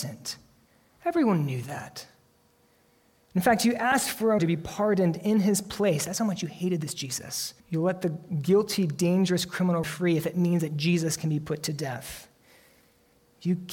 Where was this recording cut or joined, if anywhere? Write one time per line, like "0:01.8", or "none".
0:04.4
0:07.6
0:09.8